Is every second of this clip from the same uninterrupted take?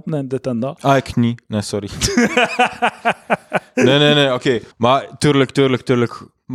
no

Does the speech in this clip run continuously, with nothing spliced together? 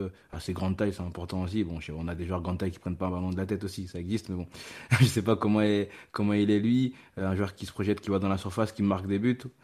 yes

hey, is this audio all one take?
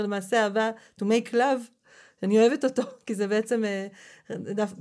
yes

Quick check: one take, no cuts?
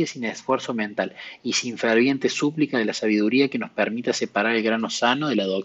yes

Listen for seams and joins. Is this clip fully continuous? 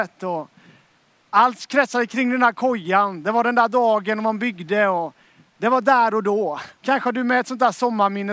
no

